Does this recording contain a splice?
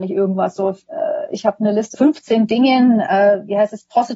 yes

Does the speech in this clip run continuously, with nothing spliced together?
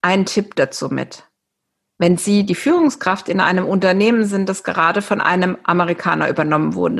yes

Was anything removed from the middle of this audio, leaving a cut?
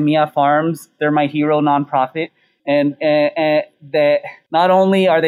no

